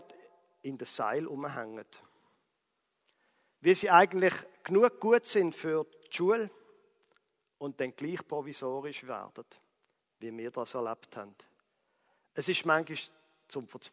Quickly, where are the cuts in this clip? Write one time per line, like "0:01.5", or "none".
none